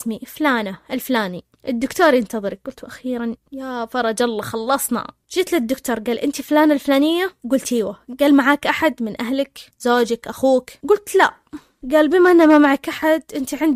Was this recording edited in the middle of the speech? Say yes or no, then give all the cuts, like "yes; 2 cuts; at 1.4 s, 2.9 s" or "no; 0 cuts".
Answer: yes; 2 cuts; at 3.4 s, 7.4 s